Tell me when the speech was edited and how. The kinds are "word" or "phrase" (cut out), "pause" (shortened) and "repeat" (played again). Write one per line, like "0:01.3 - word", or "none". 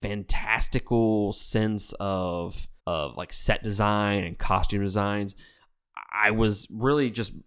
0:02.8 - pause